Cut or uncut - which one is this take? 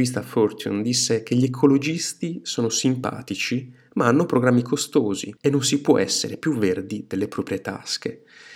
cut